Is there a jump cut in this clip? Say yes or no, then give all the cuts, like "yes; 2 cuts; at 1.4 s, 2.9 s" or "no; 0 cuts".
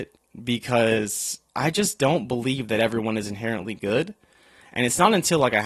no; 0 cuts